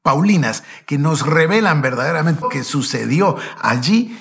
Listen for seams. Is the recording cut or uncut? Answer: cut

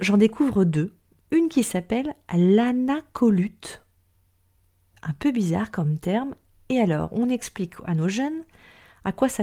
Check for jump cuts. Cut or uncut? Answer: uncut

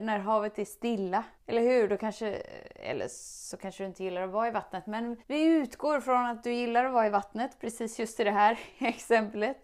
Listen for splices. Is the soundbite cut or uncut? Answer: cut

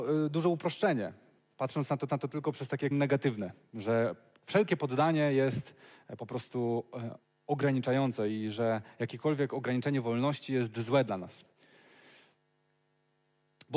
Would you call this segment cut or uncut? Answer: cut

